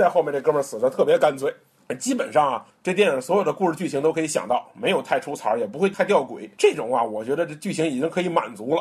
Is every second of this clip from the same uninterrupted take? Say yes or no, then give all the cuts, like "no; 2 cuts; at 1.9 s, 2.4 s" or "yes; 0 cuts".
yes; 0 cuts